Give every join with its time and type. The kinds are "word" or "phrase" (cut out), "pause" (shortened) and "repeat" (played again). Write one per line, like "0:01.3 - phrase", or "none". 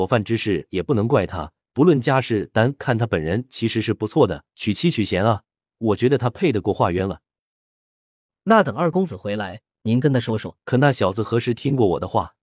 0:01.6 - pause
0:04.5 - pause
0:10.6 - pause